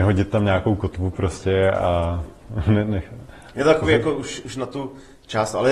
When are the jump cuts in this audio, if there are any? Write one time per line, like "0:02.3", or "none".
none

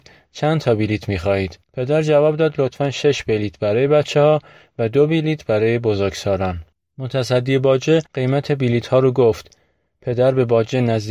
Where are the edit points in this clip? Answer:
0:01.6
0:06.7
0:08.1

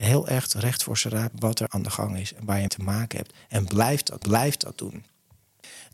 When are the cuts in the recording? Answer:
0:01.3
0:02.7
0:04.2

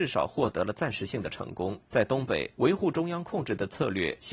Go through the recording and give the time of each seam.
0:01.8
0:02.5

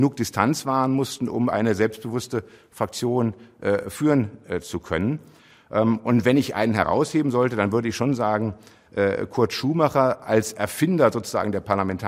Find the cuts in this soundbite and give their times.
none

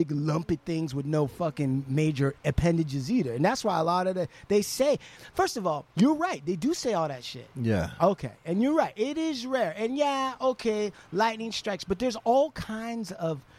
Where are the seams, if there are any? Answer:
0:05.9

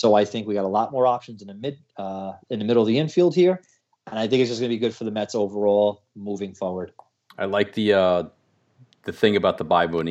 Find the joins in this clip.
none

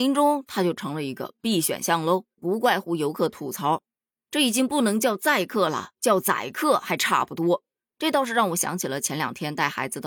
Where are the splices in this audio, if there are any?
0:02.3

